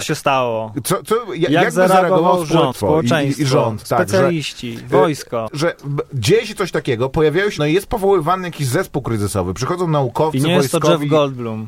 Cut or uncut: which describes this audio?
cut